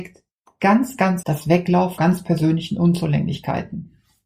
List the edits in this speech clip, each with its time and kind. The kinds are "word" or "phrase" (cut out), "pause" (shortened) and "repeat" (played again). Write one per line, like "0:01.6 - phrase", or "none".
0:01.2 - word
0:02.0 - phrase